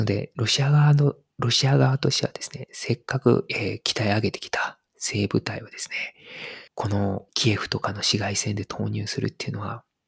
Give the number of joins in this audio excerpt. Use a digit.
2